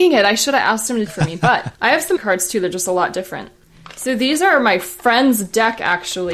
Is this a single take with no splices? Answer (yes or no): no